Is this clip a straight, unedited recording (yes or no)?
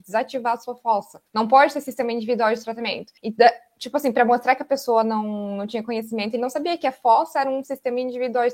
no